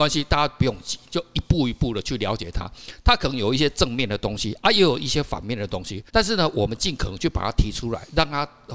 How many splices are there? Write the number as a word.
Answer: one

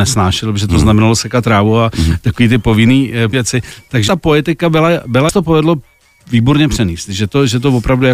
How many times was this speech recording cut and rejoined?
three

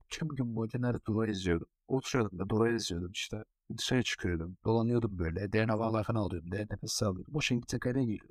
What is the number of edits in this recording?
two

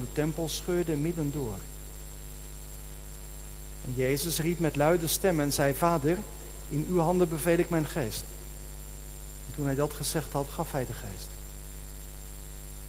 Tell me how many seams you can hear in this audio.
zero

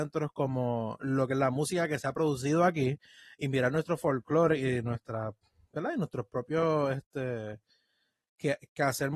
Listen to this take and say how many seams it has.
zero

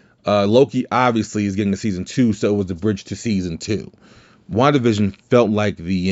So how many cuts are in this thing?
zero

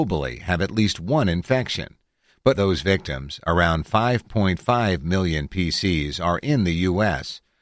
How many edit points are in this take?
one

